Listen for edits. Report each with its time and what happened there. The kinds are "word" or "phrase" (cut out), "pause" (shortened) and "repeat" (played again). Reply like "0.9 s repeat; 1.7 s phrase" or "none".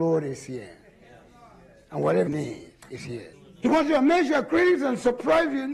2.3 s word